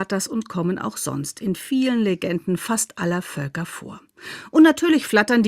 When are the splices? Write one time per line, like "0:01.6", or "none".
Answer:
none